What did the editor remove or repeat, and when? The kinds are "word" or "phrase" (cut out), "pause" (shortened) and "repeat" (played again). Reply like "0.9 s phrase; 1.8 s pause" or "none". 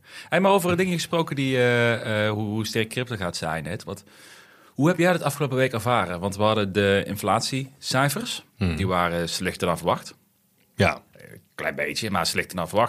8.5 s pause; 11.1 s pause